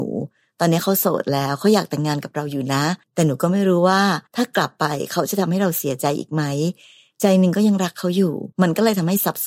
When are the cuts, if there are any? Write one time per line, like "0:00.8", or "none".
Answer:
0:03.0
0:04.3
0:08.5